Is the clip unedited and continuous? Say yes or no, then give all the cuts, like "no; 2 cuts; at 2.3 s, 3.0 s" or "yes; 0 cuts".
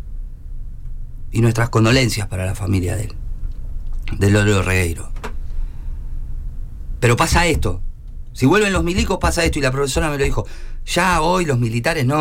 yes; 0 cuts